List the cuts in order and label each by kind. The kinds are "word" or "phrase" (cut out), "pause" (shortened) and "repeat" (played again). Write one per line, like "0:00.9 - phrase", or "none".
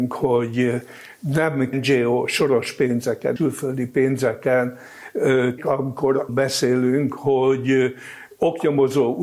0:01.7 - word
0:03.4 - word
0:05.6 - word
0:06.3 - word